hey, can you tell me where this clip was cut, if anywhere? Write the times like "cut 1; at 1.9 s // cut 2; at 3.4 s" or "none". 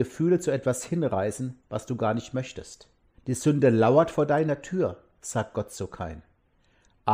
cut 1; at 3.1 s

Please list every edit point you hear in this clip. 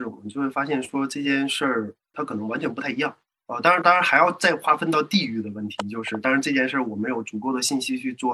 cut 1; at 2.1 s // cut 2; at 3.3 s

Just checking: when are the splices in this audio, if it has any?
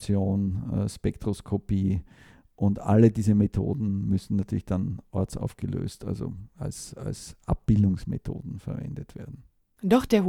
none

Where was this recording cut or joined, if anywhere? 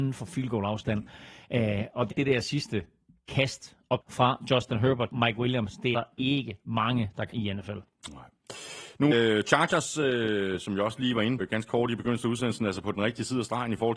cut 1; at 2.1 s // cut 2; at 4.0 s // cut 3; at 5.1 s // cut 4; at 5.9 s // cut 5; at 7.3 s // cut 6; at 9.1 s // cut 7; at 11.4 s

